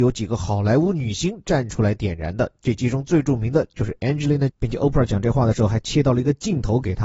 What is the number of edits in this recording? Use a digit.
1